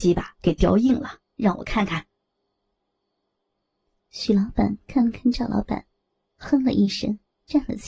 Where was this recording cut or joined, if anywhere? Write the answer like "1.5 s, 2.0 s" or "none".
none